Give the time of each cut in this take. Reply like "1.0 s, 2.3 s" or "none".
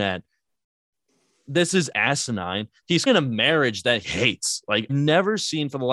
1.9 s, 3.1 s, 4.0 s, 4.9 s